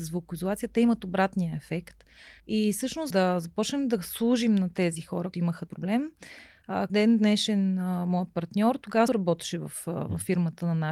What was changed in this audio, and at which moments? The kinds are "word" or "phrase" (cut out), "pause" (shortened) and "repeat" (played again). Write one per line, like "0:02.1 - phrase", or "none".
0:02.4 - pause
0:03.1 - phrase
0:05.3 - word
0:05.7 - word
0:06.9 - word
0:09.1 - word